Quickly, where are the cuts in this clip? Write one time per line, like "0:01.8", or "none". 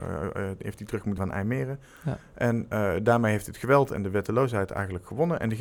0:01.2